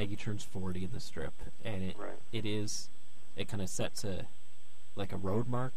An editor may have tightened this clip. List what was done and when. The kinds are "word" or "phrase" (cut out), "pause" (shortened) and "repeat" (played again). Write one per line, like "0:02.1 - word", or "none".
none